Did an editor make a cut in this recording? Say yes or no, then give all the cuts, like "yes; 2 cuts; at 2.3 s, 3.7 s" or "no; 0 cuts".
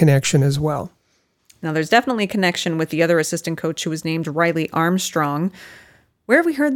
no; 0 cuts